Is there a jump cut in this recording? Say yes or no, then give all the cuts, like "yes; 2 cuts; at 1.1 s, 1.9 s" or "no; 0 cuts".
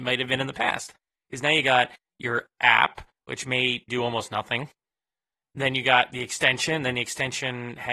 yes; 1 cut; at 3.9 s